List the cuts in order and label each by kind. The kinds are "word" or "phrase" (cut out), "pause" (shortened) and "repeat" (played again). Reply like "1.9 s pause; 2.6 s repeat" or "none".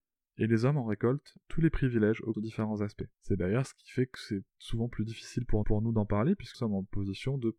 2.3 s phrase; 3.1 s pause; 4.5 s pause; 5.6 s repeat; 6.5 s word